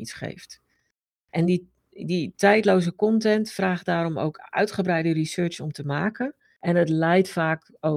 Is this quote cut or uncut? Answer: uncut